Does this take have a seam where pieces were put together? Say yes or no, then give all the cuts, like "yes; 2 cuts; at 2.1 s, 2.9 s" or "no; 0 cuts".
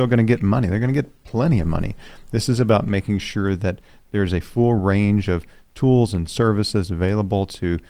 no; 0 cuts